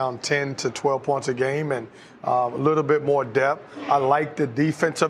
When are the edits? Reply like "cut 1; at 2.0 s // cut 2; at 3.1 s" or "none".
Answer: none

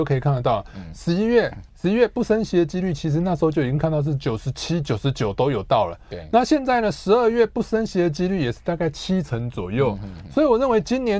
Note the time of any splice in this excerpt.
cut 1; at 1.7 s

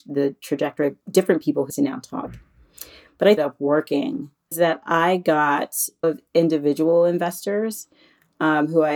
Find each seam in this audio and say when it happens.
cut 1; at 1.0 s // cut 2; at 1.7 s // cut 3; at 3.4 s // cut 4; at 4.5 s // cut 5; at 6.0 s

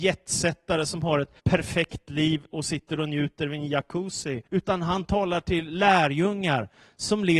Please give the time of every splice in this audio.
cut 1; at 1.4 s // cut 2; at 4.5 s

